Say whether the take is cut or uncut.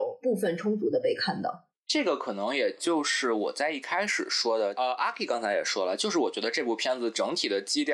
uncut